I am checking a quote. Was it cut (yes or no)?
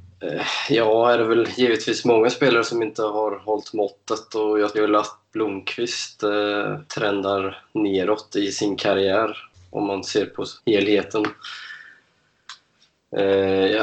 yes